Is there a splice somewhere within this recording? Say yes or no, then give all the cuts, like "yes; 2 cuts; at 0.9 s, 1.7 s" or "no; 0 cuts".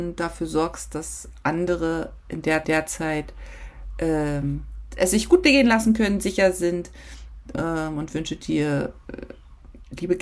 yes; 1 cut; at 2.6 s